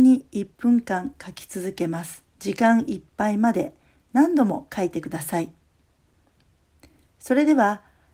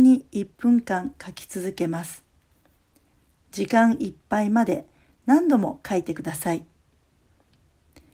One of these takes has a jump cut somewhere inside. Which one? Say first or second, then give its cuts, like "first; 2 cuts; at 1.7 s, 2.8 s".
first; 1 cut; at 2.3 s